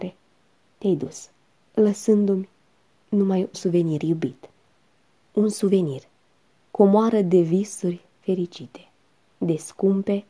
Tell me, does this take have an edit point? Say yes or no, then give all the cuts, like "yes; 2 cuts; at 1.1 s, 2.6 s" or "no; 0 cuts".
yes; 1 cut; at 3.5 s